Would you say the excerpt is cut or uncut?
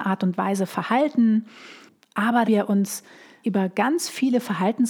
cut